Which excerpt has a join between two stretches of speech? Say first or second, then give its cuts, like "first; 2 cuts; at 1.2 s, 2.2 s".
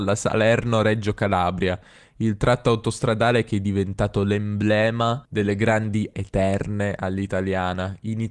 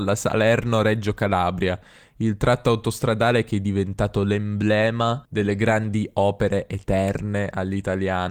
first; 1 cut; at 6.1 s